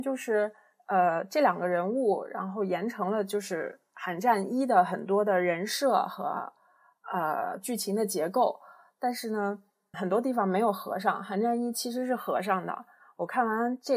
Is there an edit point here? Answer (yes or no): yes